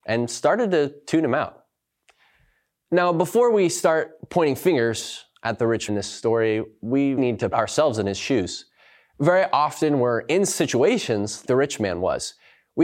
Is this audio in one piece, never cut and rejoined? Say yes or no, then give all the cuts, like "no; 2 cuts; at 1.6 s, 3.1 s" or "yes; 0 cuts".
no; 4 cuts; at 5.9 s, 7.2 s, 7.5 s, 11.5 s